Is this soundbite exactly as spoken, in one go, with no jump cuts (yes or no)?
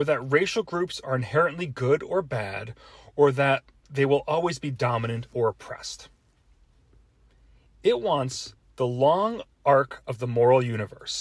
yes